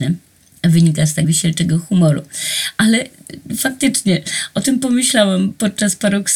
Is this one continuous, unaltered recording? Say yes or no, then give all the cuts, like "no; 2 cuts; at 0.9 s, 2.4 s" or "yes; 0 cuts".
no; 1 cut; at 1.2 s